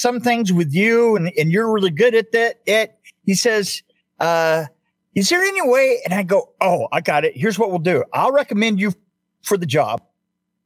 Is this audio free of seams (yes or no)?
yes